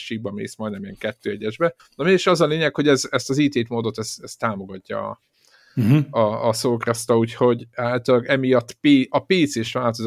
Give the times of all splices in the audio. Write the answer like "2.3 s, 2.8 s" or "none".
1.8 s